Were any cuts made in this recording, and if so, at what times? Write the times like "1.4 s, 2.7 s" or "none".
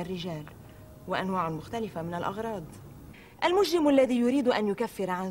3.3 s